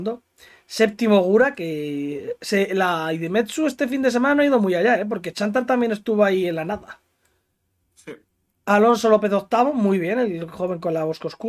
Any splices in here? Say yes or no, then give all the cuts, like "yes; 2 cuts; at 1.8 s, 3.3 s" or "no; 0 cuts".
no; 0 cuts